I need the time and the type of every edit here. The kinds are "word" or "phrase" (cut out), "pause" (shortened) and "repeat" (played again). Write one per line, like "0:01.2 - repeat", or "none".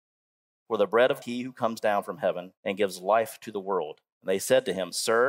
0:01.2 - phrase
0:02.6 - pause
0:04.1 - pause